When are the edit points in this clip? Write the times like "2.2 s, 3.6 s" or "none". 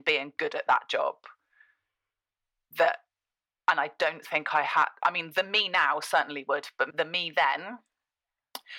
none